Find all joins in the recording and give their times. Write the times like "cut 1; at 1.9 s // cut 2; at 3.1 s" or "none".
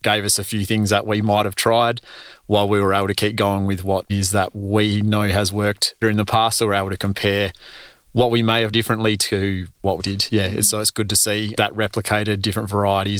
cut 1; at 4.1 s // cut 2; at 6.0 s // cut 3; at 8.7 s // cut 4; at 10.0 s